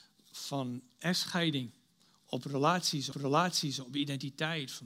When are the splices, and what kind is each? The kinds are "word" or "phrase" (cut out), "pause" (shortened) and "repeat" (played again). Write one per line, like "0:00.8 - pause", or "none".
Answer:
0:03.1 - repeat